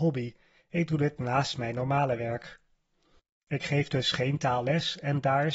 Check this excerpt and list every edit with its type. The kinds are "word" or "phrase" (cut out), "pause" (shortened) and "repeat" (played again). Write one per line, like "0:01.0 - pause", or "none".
none